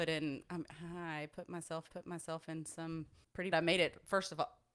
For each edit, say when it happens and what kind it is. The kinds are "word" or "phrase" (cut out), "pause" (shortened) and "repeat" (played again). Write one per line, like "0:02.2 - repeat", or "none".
0:01.9 - repeat
0:03.5 - phrase